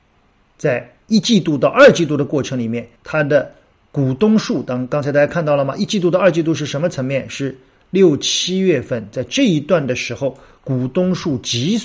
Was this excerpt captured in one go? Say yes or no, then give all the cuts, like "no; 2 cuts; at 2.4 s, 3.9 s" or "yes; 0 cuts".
no; 2 cuts; at 1.0 s, 3.0 s